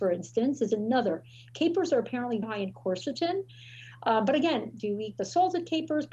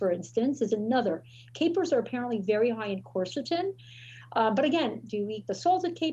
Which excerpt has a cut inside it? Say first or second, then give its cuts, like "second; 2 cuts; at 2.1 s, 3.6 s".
first; 1 cut; at 2.4 s